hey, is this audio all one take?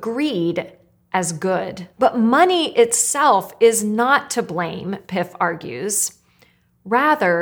no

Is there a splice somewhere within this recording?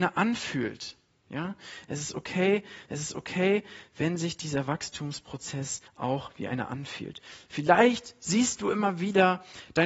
yes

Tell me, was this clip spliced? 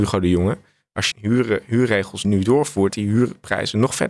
yes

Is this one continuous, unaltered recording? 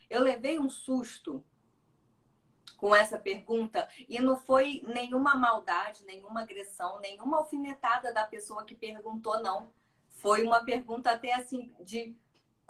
yes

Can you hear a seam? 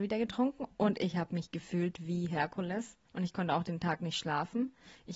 yes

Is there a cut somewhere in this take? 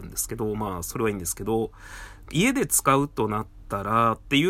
yes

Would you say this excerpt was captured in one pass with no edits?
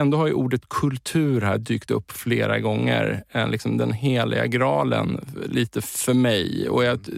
yes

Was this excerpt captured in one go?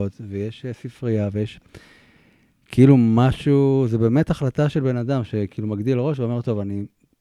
yes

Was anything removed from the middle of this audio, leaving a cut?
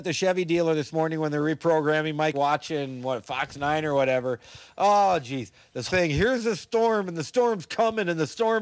yes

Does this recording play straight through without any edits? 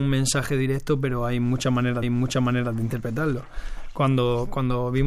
no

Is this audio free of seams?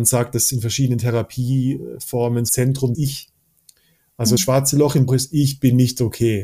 no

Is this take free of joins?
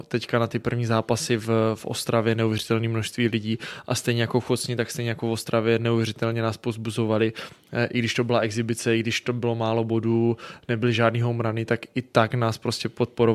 yes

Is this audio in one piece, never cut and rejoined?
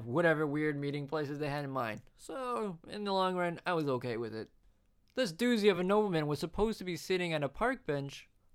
yes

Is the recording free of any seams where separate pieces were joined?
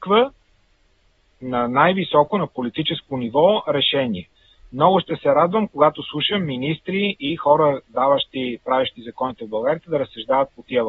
yes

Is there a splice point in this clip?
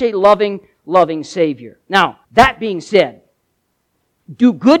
yes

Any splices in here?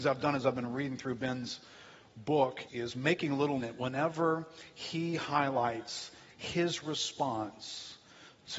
yes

